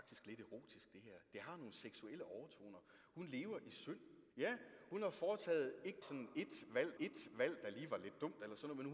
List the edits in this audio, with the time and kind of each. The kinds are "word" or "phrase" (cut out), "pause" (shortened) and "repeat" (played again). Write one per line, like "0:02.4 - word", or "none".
0:04.3 - pause
0:06.0 - word
0:07.0 - repeat